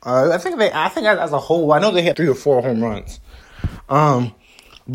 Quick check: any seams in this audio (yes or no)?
yes